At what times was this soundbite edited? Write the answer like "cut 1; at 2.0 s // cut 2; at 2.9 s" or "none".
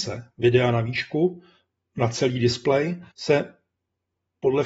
cut 1; at 3.1 s